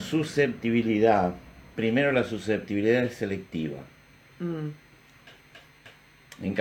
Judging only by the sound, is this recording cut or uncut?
uncut